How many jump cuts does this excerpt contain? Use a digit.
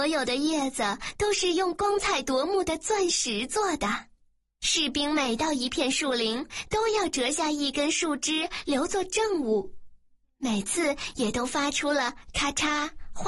0